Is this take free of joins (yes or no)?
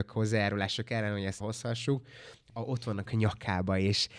no